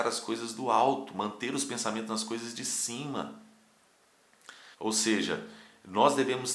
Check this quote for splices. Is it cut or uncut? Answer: cut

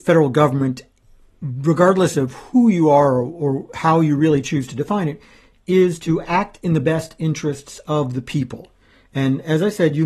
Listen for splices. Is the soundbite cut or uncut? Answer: uncut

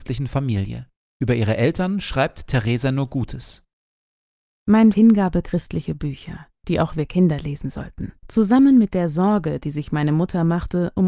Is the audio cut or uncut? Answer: cut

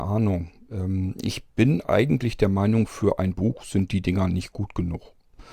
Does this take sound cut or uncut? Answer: uncut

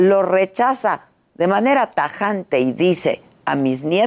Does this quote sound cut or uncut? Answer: uncut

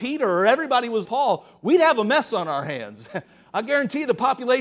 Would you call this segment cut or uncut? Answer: cut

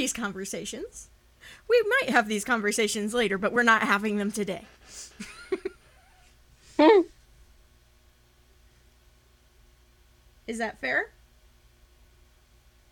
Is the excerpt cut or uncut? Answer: uncut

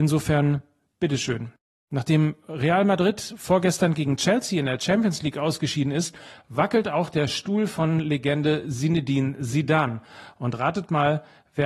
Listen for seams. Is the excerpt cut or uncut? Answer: uncut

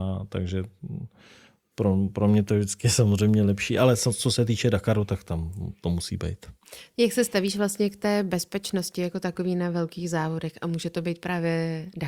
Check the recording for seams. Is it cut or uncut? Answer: uncut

